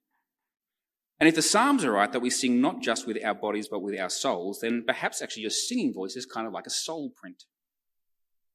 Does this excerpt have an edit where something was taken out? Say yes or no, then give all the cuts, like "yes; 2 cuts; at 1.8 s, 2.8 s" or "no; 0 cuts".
no; 0 cuts